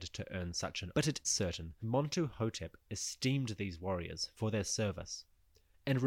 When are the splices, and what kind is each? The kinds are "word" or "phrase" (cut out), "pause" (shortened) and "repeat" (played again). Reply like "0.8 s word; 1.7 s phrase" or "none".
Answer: 0.9 s word; 1.2 s word; 1.8 s word